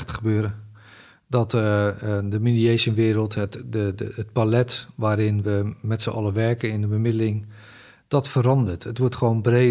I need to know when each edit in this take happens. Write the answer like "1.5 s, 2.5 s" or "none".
none